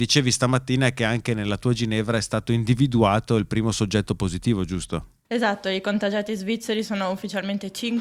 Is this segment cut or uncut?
cut